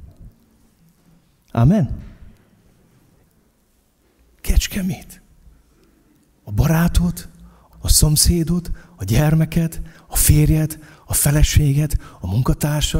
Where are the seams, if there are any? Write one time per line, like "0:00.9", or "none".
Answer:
0:07.7